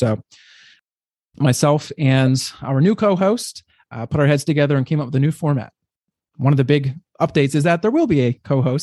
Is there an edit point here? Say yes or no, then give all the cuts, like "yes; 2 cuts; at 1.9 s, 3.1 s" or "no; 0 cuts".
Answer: no; 0 cuts